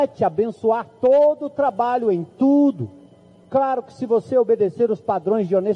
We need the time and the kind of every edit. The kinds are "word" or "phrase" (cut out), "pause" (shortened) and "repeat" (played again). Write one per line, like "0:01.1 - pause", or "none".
none